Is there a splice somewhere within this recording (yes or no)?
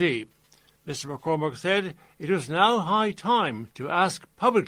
yes